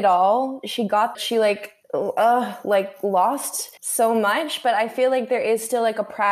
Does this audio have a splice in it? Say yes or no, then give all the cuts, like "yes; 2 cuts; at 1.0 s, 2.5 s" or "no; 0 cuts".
yes; 3 cuts; at 1.1 s, 1.8 s, 3.8 s